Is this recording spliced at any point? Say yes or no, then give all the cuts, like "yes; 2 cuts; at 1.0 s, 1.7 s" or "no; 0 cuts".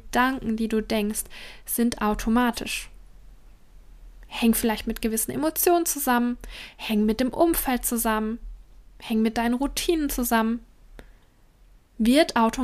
no; 0 cuts